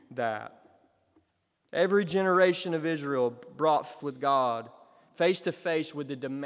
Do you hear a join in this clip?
yes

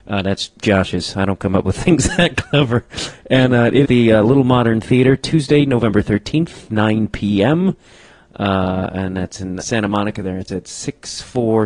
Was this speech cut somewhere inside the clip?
yes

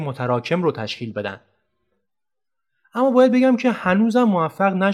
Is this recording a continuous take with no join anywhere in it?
yes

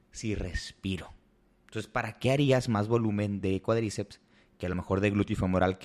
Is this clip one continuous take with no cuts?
yes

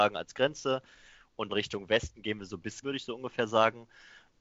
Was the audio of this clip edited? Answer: yes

